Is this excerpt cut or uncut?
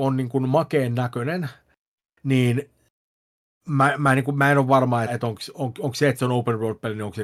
cut